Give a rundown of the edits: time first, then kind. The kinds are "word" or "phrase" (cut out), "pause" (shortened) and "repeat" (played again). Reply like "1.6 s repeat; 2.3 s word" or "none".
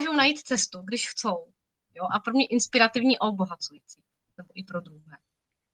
none